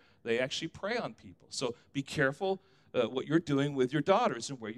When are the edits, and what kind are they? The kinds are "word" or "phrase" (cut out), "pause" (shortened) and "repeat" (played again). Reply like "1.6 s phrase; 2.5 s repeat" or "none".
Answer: none